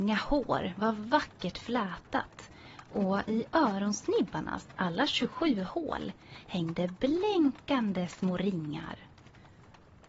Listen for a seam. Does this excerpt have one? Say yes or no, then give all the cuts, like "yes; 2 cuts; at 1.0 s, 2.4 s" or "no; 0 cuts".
no; 0 cuts